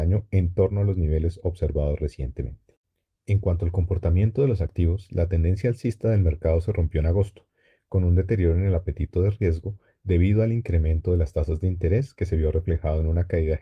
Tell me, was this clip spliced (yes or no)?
no